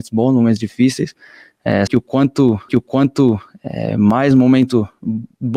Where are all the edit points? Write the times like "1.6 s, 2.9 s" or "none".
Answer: 1.9 s, 2.7 s